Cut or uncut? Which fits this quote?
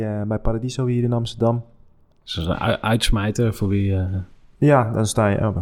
uncut